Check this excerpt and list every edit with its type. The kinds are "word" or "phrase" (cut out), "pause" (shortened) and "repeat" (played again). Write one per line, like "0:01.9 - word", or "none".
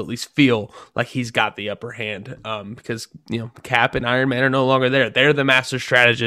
none